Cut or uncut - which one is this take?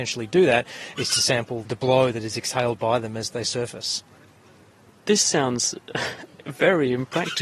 uncut